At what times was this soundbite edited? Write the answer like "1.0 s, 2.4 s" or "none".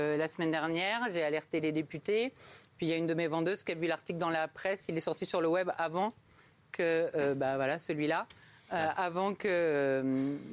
none